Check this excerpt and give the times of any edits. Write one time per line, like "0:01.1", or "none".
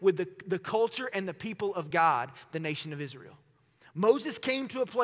none